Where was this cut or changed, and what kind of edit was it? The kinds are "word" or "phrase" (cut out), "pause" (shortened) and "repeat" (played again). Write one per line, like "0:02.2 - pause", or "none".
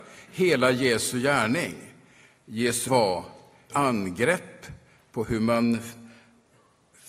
0:02.9 - word
0:03.7 - word